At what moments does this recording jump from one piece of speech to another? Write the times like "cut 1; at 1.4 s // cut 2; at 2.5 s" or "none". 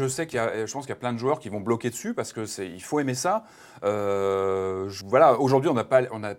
cut 1; at 5.0 s